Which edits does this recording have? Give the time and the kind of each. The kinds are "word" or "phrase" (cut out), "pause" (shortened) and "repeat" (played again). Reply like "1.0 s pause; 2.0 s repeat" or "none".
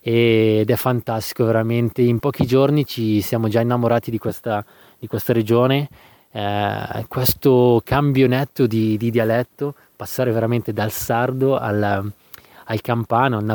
none